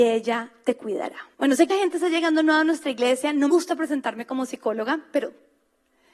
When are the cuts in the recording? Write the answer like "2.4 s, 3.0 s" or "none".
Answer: 1.3 s, 1.7 s, 3.5 s